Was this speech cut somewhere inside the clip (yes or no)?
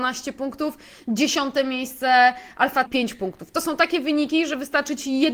yes